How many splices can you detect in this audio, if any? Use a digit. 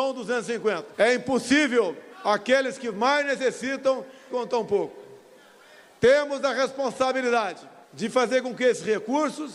4